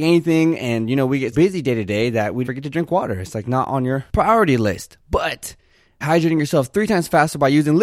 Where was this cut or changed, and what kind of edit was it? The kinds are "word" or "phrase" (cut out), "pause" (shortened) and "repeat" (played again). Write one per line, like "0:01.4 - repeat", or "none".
0:01.3 - word
0:02.4 - word
0:06.0 - word